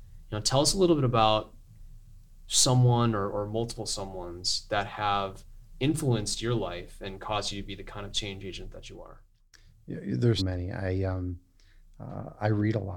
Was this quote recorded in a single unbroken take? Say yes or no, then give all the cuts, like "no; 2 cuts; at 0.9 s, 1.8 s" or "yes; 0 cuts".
no; 1 cut; at 10.4 s